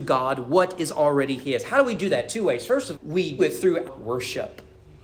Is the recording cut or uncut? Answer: cut